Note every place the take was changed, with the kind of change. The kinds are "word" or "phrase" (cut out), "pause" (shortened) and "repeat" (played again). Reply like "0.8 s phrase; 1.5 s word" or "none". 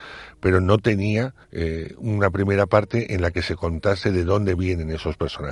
1.4 s pause